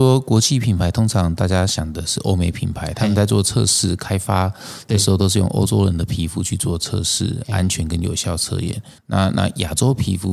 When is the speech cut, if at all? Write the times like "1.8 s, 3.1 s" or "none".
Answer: 9.0 s